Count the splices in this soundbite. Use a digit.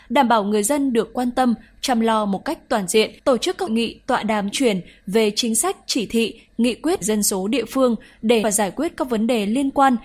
5